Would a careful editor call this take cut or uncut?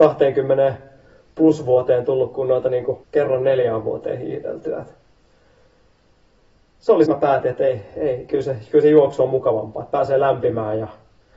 cut